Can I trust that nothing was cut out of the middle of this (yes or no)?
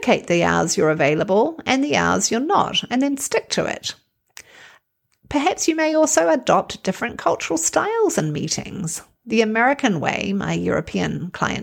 yes